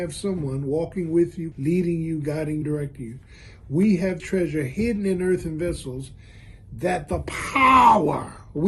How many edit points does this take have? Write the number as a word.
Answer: three